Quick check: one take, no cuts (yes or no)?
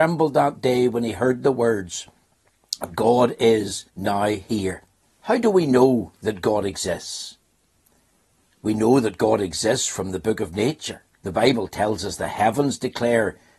no